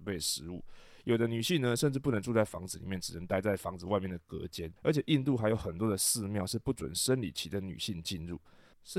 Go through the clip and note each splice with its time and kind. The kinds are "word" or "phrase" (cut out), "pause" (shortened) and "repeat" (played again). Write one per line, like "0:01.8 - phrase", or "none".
0:04.8 - pause